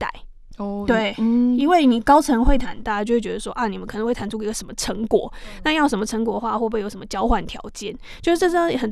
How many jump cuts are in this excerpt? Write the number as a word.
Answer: zero